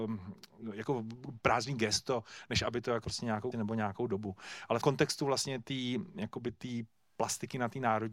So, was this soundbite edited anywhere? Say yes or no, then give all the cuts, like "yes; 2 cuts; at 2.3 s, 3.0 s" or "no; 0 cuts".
yes; 3 cuts; at 3.0 s, 3.5 s, 4.8 s